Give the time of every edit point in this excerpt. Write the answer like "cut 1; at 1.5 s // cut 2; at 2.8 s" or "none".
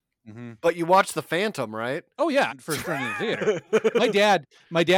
cut 1; at 2.1 s // cut 2; at 2.5 s